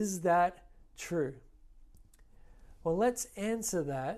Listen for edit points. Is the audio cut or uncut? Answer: uncut